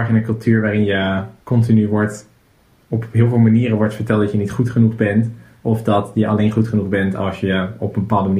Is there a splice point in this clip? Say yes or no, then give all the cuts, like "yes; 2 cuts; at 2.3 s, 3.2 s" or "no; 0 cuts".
yes; 1 cut; at 1.4 s